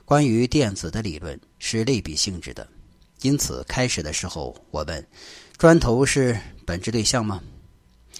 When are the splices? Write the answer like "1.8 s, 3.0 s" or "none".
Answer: none